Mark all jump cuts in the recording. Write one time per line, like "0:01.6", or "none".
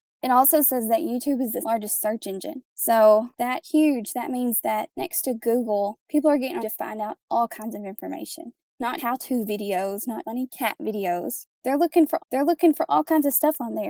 0:01.6
0:03.6
0:06.6
0:09.0
0:10.2
0:12.2